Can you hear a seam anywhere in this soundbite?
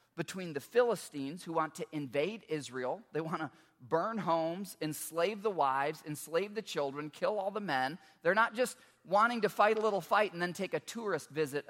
no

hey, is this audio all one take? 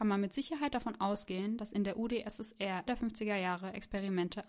no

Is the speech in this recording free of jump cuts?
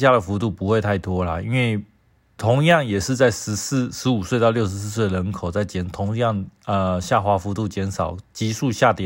no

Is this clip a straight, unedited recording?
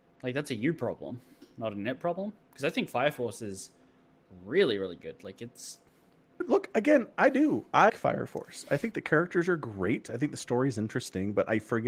no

